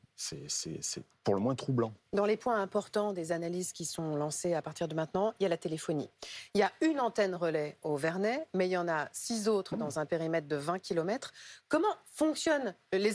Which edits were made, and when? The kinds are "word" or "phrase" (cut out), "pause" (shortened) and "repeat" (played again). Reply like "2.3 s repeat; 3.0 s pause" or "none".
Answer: none